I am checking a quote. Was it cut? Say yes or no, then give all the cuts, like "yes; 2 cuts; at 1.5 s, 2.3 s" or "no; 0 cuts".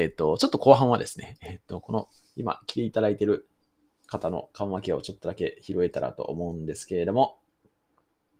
no; 0 cuts